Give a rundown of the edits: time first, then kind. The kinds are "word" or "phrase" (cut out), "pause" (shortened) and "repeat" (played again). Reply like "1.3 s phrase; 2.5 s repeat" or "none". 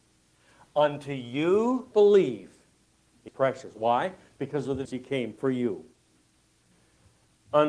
1.9 s word; 3.3 s word; 4.8 s word

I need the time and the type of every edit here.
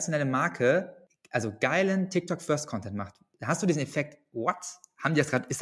none

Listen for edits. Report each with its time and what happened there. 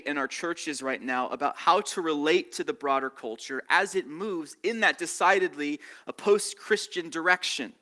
none

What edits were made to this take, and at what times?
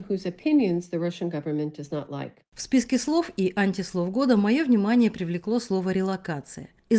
none

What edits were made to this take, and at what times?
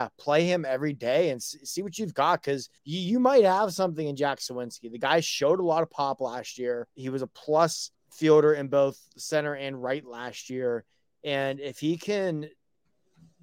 2.8 s pause; 6.9 s pause; 7.9 s pause

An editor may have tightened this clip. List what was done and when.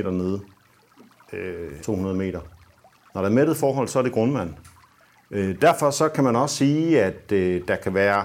1.8 s word

